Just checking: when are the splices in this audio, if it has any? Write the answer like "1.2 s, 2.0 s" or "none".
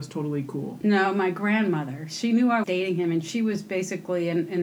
2.6 s